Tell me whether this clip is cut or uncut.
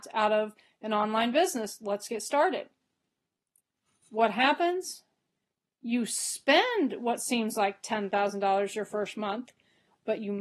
uncut